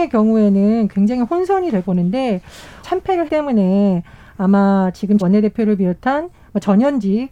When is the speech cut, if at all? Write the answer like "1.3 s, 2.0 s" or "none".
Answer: 1.8 s, 2.8 s, 3.3 s, 5.2 s